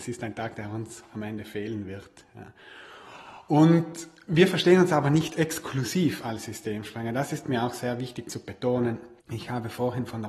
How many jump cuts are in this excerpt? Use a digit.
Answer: 1